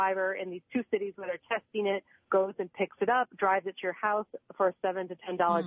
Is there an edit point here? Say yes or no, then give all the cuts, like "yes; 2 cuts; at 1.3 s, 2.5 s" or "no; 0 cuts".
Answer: no; 0 cuts